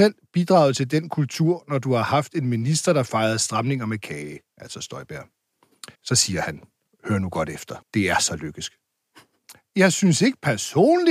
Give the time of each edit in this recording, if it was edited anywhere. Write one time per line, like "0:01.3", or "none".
0:05.9
0:06.9
0:07.8